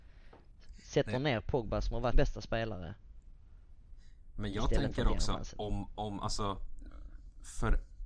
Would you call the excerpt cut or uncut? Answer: cut